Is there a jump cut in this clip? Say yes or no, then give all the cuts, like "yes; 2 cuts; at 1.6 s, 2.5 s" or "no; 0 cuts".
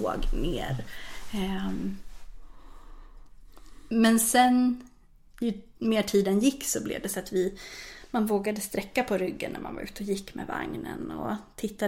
no; 0 cuts